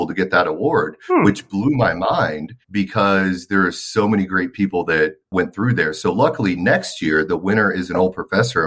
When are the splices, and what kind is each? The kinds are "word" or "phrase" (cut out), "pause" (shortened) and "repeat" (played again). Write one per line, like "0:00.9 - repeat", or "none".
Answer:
0:02.6 - pause